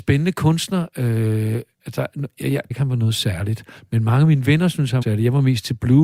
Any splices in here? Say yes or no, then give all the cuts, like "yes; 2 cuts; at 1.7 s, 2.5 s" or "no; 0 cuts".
yes; 2 cuts; at 2.7 s, 5.0 s